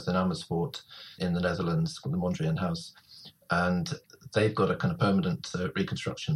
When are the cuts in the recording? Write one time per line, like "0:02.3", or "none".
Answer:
0:01.2